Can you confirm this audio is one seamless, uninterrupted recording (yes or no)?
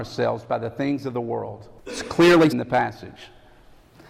no